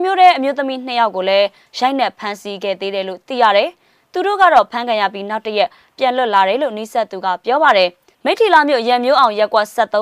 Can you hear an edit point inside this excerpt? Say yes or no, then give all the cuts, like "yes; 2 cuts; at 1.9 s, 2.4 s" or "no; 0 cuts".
no; 0 cuts